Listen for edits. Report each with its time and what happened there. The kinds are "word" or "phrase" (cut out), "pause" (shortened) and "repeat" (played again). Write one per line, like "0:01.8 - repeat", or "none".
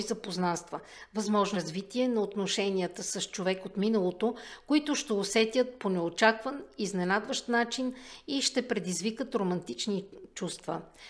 0:01.5 - word

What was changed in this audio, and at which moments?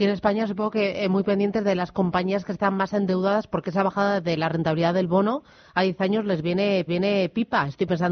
0:06.9 - repeat

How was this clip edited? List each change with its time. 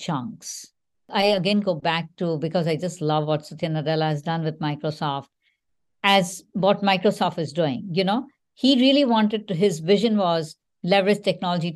none

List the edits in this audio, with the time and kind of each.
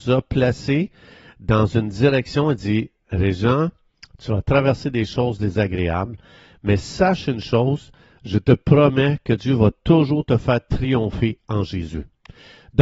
none

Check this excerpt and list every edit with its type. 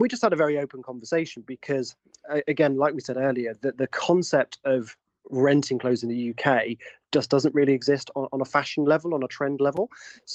none

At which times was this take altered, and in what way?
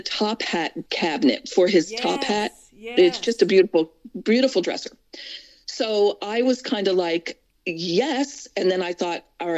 none

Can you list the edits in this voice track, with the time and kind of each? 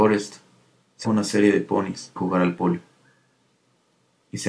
0:01.0 - word
0:02.2 - word

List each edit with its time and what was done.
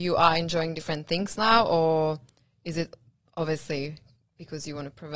none

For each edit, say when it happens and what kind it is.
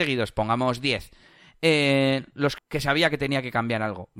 0:02.6 - phrase

